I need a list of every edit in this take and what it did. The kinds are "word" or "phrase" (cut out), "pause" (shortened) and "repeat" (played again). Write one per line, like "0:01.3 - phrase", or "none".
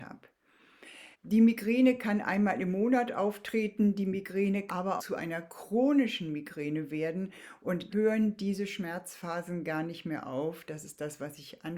0:01.1 - pause
0:04.7 - word
0:05.0 - word
0:07.9 - word